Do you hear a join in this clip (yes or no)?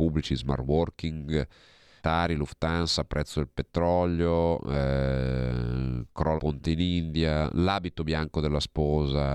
yes